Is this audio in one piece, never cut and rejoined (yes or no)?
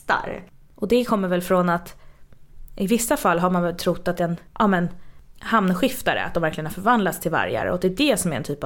no